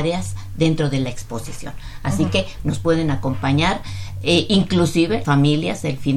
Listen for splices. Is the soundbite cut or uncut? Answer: cut